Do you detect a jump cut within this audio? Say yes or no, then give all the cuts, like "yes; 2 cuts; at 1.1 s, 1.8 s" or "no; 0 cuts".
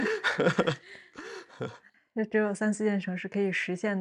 no; 0 cuts